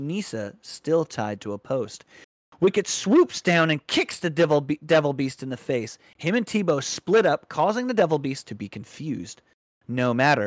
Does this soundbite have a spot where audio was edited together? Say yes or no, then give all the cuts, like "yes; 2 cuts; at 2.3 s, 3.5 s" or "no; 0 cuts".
no; 0 cuts